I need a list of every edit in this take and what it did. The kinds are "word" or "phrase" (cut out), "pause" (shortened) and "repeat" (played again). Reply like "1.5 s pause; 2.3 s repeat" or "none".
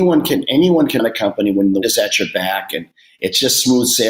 1.0 s word; 1.8 s word